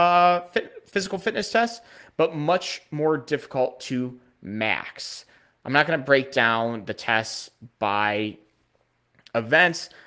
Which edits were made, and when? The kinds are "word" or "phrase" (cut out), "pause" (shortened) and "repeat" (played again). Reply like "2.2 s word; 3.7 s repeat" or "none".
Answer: none